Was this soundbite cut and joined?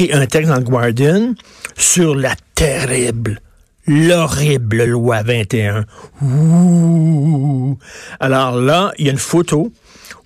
no; 0 cuts

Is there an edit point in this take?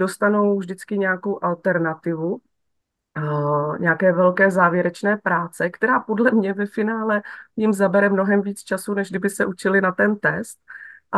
yes; 1 cut; at 7.5 s

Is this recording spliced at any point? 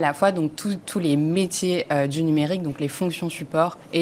no; 0 cuts

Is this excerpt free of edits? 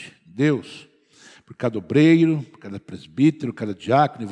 yes; 0 cuts

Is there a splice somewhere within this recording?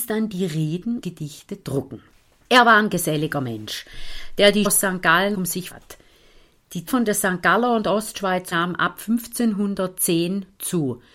yes; 6 cuts; at 1.0 s, 4.6 s, 5.3 s, 5.7 s, 6.9 s, 8.5 s

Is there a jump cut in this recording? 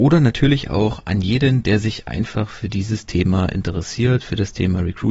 no; 0 cuts

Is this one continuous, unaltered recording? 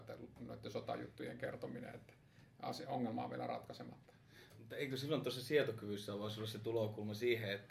yes; 0 cuts

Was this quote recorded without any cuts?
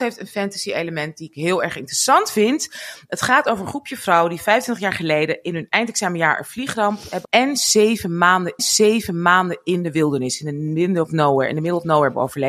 no; 2 cuts; at 7.2 s, 8.6 s

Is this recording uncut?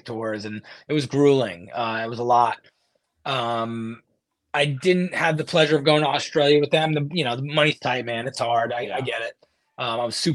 yes; 0 cuts

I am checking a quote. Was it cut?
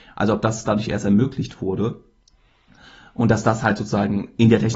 no; 0 cuts

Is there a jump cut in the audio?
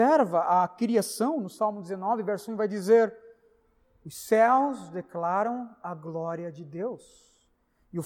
no; 0 cuts

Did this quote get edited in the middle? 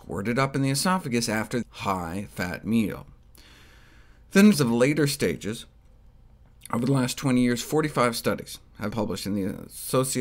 yes; 3 cuts; at 1.6 s, 4.5 s, 8.9 s

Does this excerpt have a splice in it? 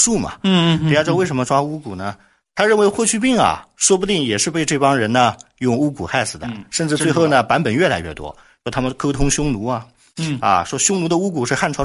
no; 0 cuts

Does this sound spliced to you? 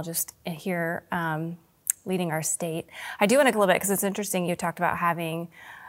yes; 1 cut; at 3.5 s

